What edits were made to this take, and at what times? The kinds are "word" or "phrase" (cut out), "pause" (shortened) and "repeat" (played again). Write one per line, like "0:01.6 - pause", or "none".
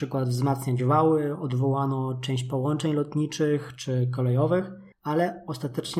0:04.9 - pause

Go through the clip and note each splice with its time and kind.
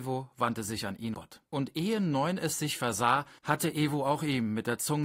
0:01.1 - word
0:01.5 - pause
0:03.4 - pause

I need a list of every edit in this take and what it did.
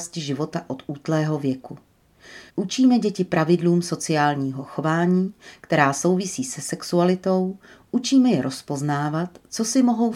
0:02.5 - pause

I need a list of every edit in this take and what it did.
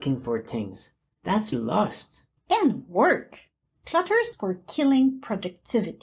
0:01.5 - word
0:02.4 - pause
0:04.3 - word

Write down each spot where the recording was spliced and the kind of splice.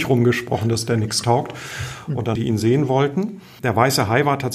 0:02.4 - phrase

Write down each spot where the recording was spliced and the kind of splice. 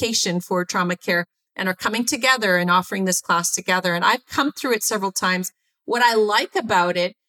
none

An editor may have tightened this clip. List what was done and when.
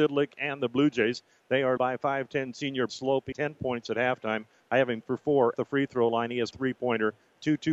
0:01.8 - word
0:02.9 - word
0:03.3 - word
0:05.0 - word
0:05.5 - word
0:06.5 - word

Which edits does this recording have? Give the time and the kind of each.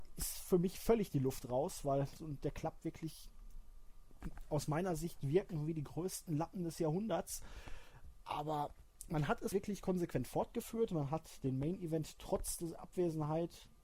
0:02.2 - word
0:09.5 - word

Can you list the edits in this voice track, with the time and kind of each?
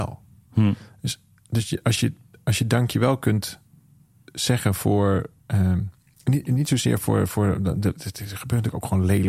none

